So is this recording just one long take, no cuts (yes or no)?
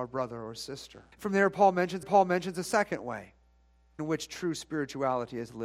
no